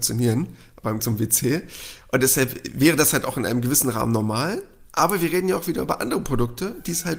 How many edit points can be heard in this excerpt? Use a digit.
1